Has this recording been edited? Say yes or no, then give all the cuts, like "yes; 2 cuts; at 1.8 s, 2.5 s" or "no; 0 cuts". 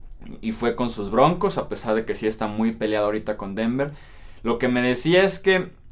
no; 0 cuts